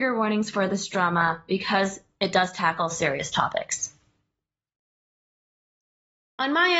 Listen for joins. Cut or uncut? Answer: cut